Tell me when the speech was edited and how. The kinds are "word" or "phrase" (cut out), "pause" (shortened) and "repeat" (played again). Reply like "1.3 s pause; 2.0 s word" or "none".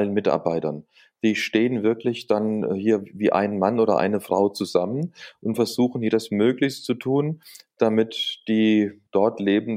none

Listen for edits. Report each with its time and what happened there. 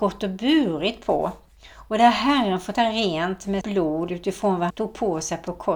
2.7 s word; 3.6 s word; 4.7 s word

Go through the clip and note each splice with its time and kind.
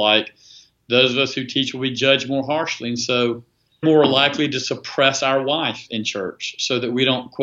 3.8 s word

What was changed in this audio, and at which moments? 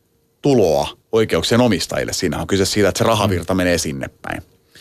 1.0 s pause

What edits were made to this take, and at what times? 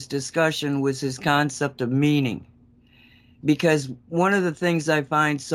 4.0 s pause

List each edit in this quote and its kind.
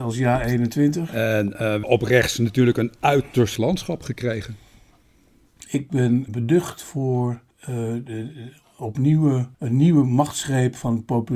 1.8 s word; 3.6 s word; 6.3 s word; 7.5 s pause; 9.5 s pause

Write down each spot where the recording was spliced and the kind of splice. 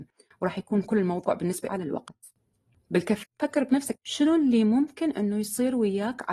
1.7 s phrase; 3.2 s word; 3.9 s word

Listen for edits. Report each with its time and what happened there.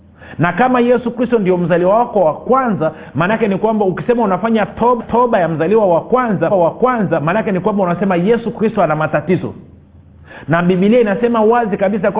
5.0 s repeat; 6.5 s repeat

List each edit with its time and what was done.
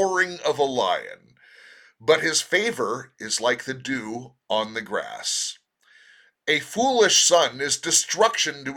none

